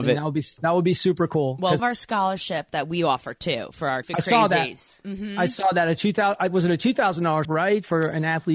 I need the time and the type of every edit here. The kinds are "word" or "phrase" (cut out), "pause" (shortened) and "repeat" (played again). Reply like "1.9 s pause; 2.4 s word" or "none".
1.8 s phrase; 4.0 s word; 7.4 s word